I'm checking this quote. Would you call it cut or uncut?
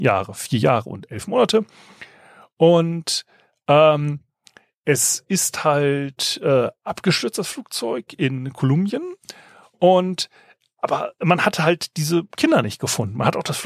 uncut